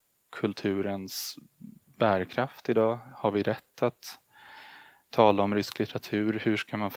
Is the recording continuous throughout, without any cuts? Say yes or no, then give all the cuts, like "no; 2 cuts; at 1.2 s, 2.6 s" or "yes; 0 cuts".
yes; 0 cuts